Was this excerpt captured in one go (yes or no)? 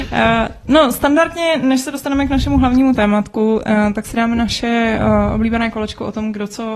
yes